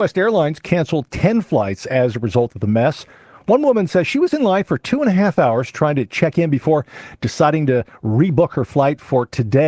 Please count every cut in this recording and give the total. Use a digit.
0